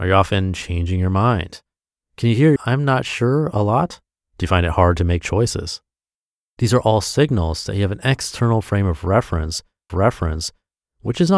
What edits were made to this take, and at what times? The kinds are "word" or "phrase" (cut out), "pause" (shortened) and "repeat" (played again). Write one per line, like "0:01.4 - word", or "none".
0:02.6 - phrase
0:04.2 - pause
0:09.9 - repeat